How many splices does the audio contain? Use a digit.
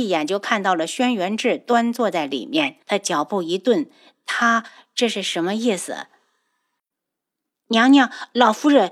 1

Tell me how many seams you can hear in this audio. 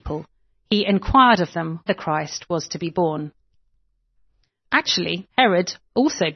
2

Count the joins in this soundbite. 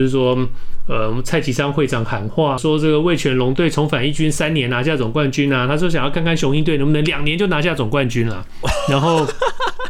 1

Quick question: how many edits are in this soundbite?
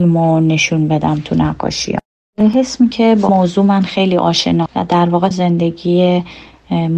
4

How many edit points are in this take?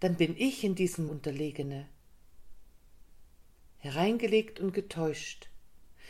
1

